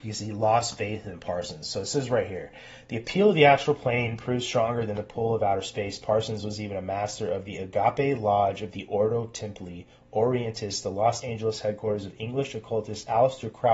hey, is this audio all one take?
yes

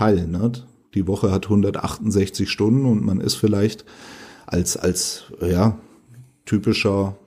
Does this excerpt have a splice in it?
no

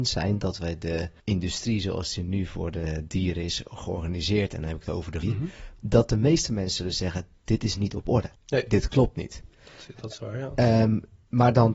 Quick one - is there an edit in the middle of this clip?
yes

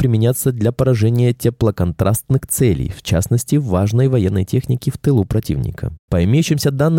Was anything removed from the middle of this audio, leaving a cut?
no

